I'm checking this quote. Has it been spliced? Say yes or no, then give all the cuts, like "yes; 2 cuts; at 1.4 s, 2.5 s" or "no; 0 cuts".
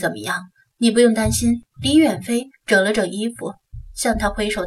yes; 1 cut; at 1.7 s